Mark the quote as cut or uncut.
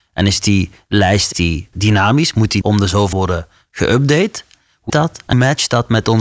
cut